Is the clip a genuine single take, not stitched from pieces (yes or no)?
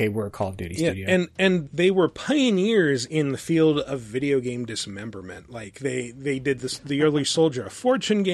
no